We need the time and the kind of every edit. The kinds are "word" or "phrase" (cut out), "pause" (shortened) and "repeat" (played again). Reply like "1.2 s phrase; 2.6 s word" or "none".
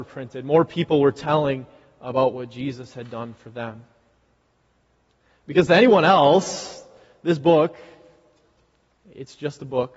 none